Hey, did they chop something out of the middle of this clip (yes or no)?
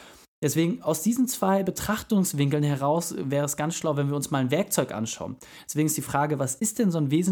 no